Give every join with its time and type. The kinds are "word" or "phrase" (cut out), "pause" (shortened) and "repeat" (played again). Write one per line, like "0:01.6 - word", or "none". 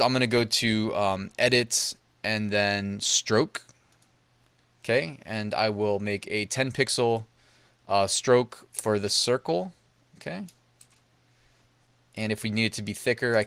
none